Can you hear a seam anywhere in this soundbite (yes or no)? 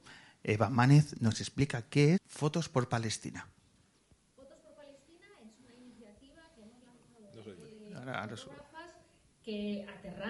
yes